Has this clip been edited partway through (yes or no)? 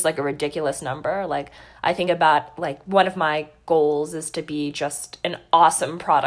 no